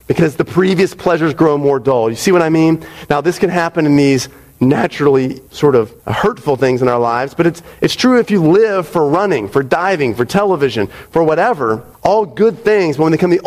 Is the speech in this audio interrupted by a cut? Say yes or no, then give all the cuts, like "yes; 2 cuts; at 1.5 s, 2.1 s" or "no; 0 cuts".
yes; 3 cuts; at 5.5 s, 6.0 s, 11.9 s